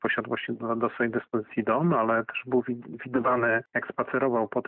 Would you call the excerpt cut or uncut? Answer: cut